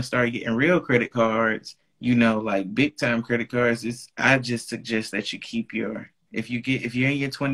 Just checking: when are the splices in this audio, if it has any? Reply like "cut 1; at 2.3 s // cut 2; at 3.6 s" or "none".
cut 1; at 1.8 s